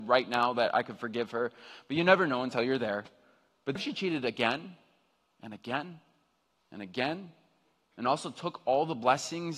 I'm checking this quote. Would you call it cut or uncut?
cut